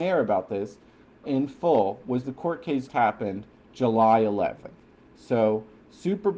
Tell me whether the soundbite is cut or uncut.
cut